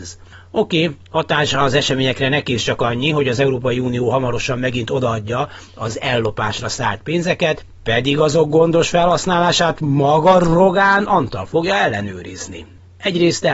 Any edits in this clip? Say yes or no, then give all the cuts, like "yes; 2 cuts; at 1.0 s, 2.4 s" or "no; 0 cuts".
no; 0 cuts